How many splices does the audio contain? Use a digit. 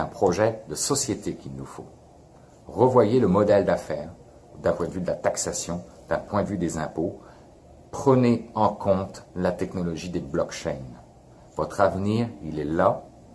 0